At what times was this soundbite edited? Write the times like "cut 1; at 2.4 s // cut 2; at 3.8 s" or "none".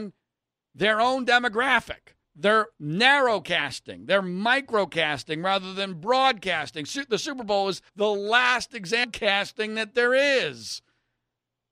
cut 1; at 2.2 s // cut 2; at 7.9 s